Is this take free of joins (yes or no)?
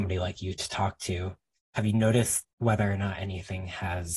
no